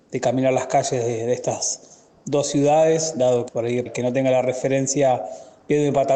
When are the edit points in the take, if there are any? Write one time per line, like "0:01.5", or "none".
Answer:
0:03.5
0:03.9